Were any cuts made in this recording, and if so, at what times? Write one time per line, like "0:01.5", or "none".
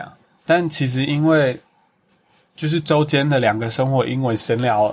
none